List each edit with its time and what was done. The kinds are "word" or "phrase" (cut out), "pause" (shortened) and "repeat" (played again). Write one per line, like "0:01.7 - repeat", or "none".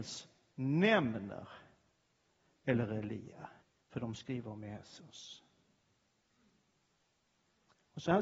0:02.5 - word
0:03.6 - pause